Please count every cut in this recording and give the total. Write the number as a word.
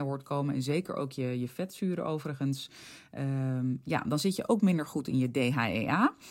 zero